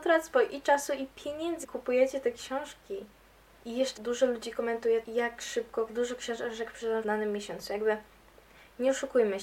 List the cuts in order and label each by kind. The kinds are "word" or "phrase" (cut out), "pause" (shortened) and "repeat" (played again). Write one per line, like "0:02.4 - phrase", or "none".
0:01.6 - word
0:04.0 - phrase
0:05.0 - word
0:05.9 - phrase
0:07.0 - word

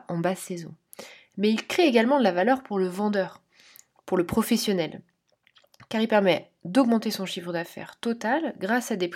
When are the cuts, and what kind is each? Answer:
none

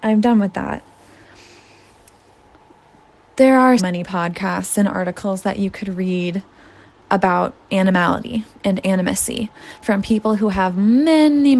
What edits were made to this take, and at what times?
0:03.8 - word

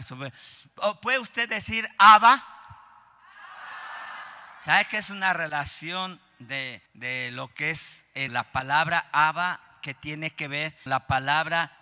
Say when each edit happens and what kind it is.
0:06.9 - pause
0:08.3 - word
0:10.9 - word

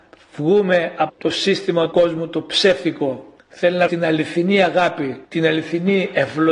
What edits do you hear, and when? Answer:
0:01.1 - word
0:01.9 - word
0:03.4 - pause
0:03.9 - word
0:05.2 - pause

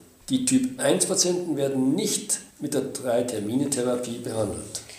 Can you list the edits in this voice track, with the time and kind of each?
0:02.5 - pause

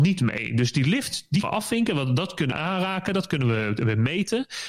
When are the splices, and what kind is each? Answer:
0:01.4 - word
0:02.5 - word

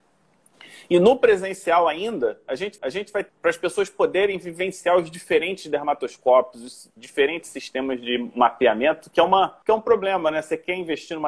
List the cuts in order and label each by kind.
0:02.8 - repeat
0:03.3 - word
0:07.0 - pause
0:09.6 - pause

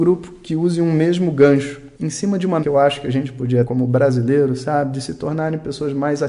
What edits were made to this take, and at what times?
0:01.9 - pause
0:02.6 - word
0:03.6 - word

